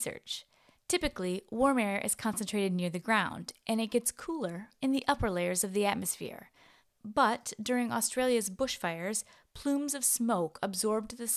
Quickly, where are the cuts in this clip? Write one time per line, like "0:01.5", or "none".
none